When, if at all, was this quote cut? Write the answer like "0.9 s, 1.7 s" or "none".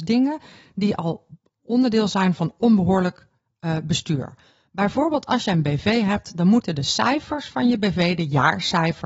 none